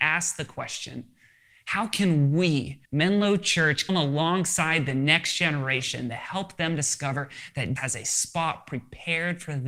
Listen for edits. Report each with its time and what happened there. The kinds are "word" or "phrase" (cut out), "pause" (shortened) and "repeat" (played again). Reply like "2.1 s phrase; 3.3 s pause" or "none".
2.8 s pause; 3.9 s word; 7.8 s word